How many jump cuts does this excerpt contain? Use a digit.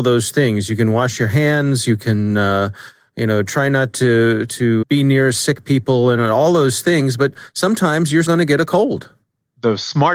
2